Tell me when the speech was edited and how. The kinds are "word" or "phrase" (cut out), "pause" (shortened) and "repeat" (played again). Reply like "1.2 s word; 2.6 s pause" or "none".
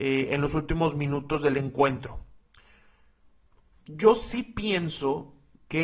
none